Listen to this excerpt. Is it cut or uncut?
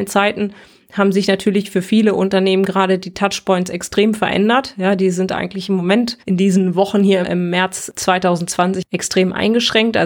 cut